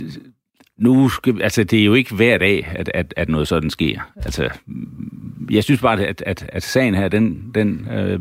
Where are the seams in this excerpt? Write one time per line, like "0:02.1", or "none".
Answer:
0:06.5

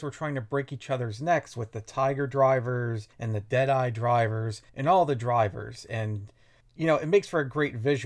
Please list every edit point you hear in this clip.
0:03.1
0:04.7
0:06.6

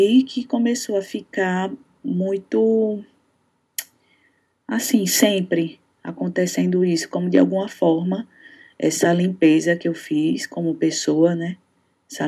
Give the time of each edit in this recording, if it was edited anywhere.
none

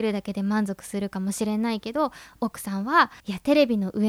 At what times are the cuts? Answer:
0:03.2

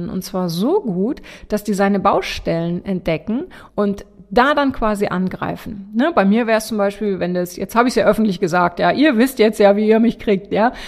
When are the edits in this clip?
0:03.7

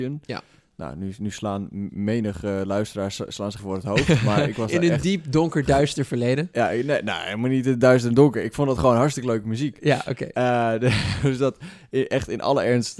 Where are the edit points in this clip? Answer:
0:03.6

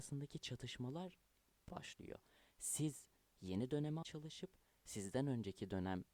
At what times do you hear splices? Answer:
0:01.7
0:04.0

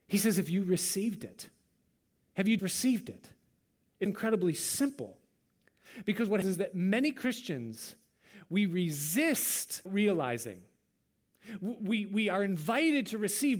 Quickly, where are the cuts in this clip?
0:02.6
0:04.1
0:06.4
0:09.9

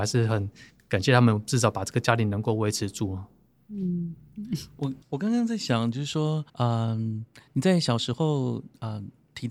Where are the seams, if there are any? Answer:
0:05.0
0:06.5

